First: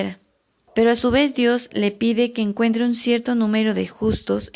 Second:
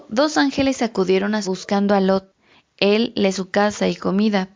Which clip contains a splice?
second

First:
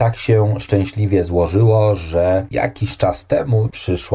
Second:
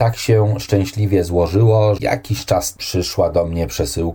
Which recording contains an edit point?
second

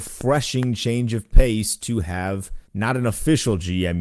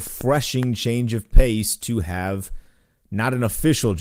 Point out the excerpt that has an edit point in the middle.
first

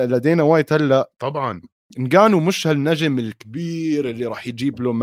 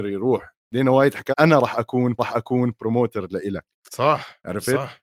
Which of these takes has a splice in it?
second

